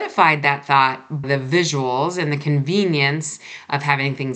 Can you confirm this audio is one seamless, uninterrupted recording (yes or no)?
no